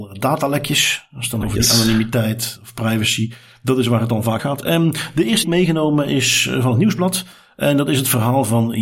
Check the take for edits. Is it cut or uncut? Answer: cut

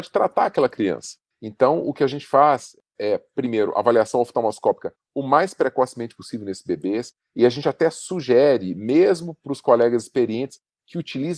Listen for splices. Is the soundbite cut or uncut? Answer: uncut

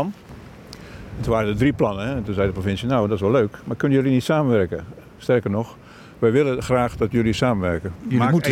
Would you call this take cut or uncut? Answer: uncut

